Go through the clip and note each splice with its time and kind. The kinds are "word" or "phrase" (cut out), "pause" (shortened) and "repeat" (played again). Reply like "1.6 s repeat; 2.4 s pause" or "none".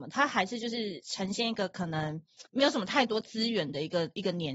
2.5 s pause